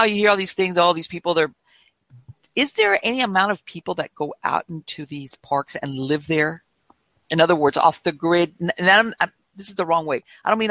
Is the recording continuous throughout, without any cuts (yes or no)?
no